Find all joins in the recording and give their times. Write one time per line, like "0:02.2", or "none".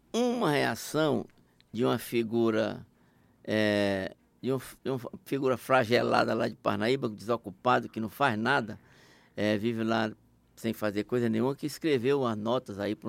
none